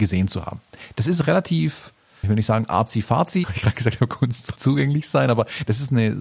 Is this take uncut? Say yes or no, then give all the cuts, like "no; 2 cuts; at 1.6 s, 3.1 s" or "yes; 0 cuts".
no; 3 cuts; at 2.2 s, 3.4 s, 4.6 s